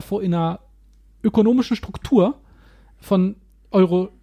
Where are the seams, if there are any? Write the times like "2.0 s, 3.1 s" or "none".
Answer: none